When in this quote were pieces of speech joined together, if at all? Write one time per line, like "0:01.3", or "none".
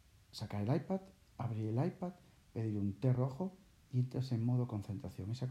none